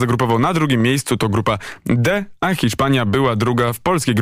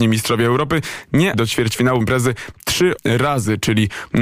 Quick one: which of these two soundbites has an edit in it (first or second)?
second